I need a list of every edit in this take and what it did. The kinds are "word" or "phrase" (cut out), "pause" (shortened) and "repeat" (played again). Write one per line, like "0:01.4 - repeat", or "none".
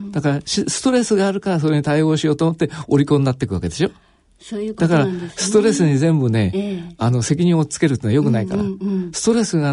none